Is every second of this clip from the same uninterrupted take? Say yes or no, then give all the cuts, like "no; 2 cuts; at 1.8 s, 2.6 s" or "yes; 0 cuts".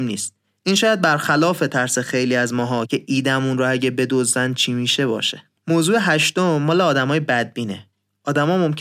no; 1 cut; at 5.6 s